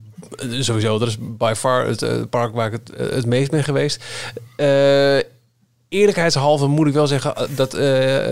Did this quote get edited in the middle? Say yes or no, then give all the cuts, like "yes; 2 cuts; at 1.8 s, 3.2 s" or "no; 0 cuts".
no; 0 cuts